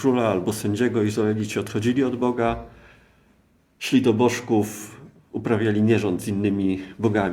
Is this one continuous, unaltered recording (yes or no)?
yes